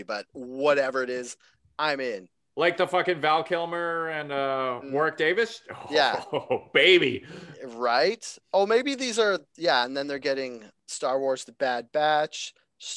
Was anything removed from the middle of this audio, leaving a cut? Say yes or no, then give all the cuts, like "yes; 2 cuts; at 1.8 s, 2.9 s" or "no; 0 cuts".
no; 0 cuts